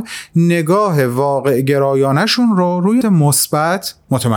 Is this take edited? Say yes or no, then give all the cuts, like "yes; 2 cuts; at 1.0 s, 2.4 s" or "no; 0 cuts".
yes; 1 cut; at 3.0 s